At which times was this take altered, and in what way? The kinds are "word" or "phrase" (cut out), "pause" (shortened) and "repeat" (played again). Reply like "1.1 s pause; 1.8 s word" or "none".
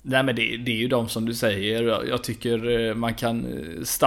none